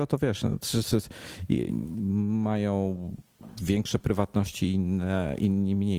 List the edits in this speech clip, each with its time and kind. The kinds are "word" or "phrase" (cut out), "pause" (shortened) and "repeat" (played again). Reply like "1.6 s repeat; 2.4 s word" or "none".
1.7 s word; 4.0 s word

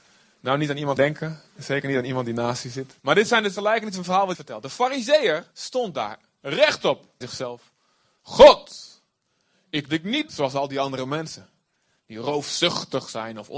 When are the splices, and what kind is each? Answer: 1.0 s word; 1.5 s pause; 3.0 s pause; 3.6 s word; 4.3 s word; 5.5 s pause; 7.2 s phrase; 9.9 s phrase; 10.3 s word

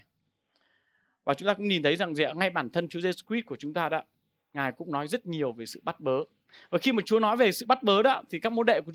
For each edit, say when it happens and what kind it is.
none

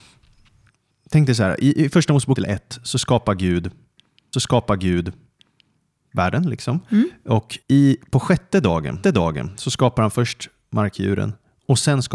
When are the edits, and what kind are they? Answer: 2.4 s word; 4.3 s repeat; 7.6 s pause; 9.0 s repeat

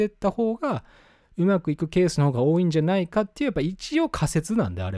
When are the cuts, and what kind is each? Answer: none

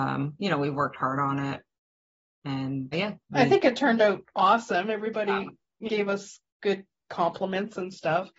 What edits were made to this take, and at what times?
2.9 s word; 5.9 s word; 6.5 s pause

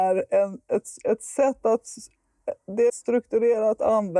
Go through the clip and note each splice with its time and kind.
2.9 s phrase

